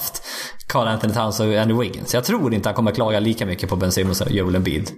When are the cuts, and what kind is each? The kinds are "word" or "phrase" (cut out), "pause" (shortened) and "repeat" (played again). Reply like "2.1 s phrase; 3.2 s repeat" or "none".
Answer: none